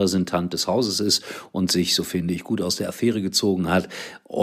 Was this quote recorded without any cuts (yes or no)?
yes